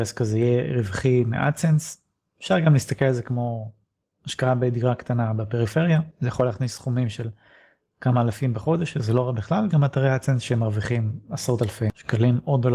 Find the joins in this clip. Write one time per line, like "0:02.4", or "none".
0:09.7